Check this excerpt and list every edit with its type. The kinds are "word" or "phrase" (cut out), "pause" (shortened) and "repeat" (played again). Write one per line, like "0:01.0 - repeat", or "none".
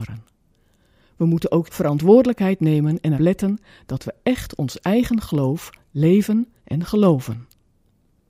0:01.6 - word
0:03.2 - word
0:06.6 - pause